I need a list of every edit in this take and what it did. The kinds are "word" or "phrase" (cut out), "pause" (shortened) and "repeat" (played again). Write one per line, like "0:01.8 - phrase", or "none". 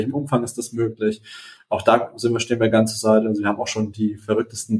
none